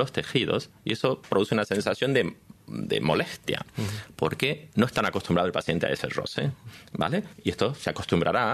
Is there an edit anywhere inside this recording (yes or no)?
no